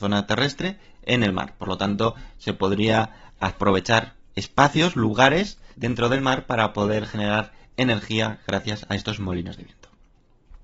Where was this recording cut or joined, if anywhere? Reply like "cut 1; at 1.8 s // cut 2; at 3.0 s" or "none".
cut 1; at 5.7 s